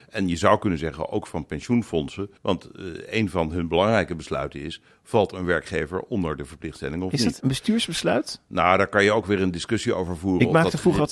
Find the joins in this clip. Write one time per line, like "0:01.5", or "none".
0:02.4
0:07.4